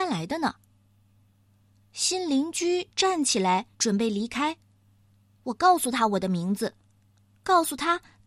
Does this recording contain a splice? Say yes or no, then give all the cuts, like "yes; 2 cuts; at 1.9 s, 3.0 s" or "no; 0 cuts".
yes; 1 cut; at 3.7 s